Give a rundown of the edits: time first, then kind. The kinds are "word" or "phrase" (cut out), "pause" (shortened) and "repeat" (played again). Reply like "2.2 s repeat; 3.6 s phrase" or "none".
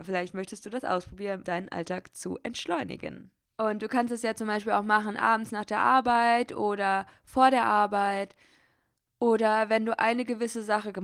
1.4 s word